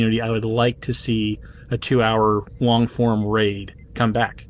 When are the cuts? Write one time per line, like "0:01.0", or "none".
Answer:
none